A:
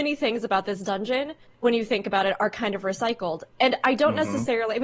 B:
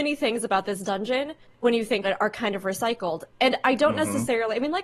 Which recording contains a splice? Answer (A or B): B